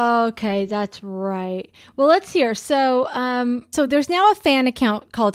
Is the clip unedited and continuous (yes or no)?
yes